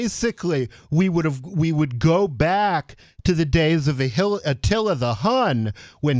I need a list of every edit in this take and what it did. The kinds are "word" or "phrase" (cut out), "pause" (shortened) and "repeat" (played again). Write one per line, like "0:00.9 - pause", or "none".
none